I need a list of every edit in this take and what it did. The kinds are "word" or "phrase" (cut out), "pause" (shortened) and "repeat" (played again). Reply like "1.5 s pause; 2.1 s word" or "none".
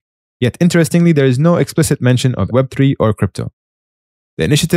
2.5 s word

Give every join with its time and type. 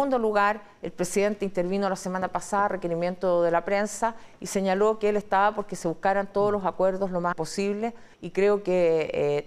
7.3 s word; 8.1 s pause

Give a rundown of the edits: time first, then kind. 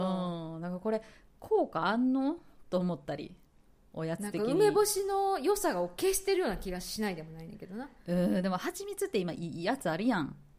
none

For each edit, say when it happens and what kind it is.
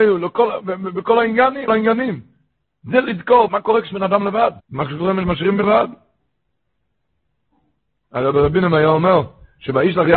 1.7 s word; 3.5 s word; 3.9 s word; 4.6 s pause; 5.2 s word; 5.6 s word

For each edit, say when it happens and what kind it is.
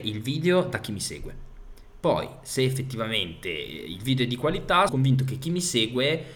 4.9 s word

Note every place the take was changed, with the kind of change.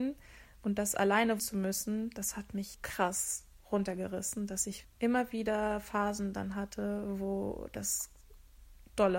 1.4 s word; 2.7 s word; 4.8 s word

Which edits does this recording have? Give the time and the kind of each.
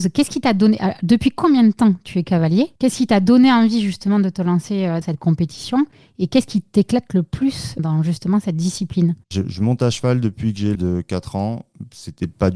2.8 s pause; 5.0 s word; 7.8 s word; 10.7 s word

